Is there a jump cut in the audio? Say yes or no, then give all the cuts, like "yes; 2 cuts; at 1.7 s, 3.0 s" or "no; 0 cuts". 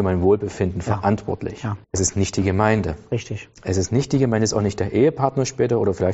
yes; 1 cut; at 1.8 s